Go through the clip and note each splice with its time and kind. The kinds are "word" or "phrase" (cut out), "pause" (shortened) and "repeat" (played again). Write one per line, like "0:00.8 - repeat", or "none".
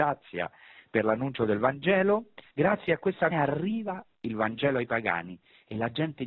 0:02.5 - pause
0:03.3 - word